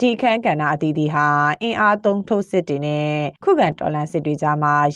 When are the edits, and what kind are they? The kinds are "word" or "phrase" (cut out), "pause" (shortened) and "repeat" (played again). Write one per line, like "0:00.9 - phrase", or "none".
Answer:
0:03.4 - pause